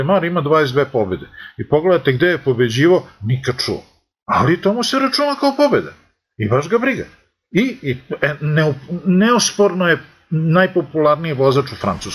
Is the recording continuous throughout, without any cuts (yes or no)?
no